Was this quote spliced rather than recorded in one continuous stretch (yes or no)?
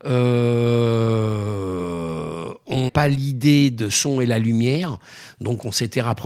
yes